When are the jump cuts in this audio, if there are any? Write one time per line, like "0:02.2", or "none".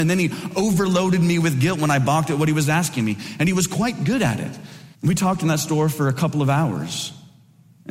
0:04.9